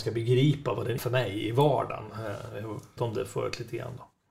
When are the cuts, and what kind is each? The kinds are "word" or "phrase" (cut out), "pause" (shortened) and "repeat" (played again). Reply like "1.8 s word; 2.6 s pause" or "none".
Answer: 1.0 s word; 3.0 s word